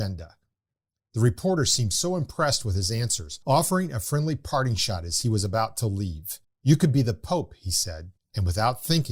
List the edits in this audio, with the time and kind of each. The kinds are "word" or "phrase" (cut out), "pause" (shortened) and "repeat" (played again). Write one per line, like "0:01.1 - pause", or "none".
0:03.4 - pause
0:06.4 - pause
0:08.2 - pause